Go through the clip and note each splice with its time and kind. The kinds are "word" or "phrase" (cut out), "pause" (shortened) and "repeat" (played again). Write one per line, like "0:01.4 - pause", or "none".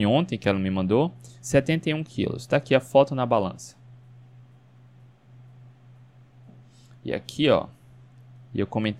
none